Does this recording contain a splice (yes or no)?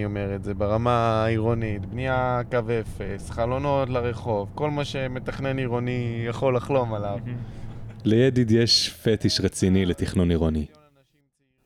no